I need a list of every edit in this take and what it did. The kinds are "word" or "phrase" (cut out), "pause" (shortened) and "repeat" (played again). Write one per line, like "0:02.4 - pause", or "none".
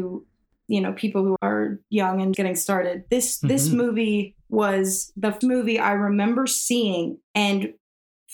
0:01.4 - word
0:02.3 - word
0:04.4 - pause
0:05.4 - word
0:07.2 - pause